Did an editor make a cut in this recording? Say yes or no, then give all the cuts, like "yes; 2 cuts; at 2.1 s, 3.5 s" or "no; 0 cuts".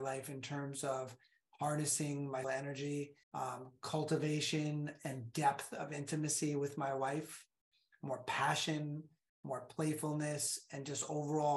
yes; 2 cuts; at 2.4 s, 3.2 s